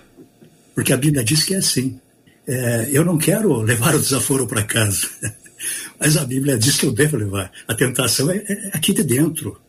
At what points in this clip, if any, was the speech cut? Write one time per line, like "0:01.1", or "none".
0:02.3